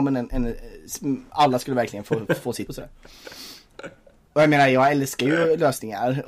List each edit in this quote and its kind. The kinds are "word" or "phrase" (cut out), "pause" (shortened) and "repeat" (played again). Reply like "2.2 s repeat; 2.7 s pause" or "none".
2.7 s word